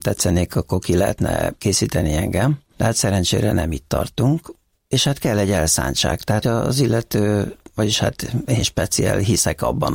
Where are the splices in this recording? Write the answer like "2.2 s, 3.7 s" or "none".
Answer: 6.4 s